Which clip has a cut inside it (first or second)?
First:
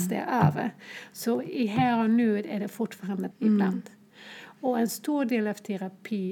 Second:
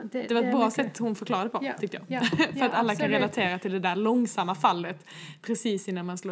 first